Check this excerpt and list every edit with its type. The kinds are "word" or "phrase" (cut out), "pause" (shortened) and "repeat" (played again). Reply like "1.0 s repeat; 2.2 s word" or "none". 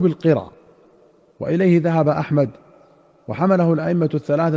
none